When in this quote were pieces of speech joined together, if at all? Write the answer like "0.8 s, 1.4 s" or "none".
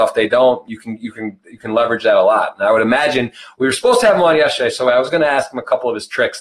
none